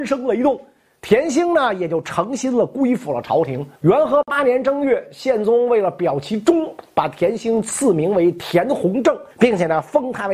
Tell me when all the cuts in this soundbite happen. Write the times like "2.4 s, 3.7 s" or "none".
3.8 s, 9.3 s